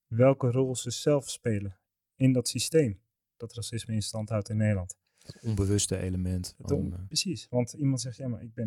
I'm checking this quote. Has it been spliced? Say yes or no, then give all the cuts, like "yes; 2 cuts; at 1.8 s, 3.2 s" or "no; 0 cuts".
no; 0 cuts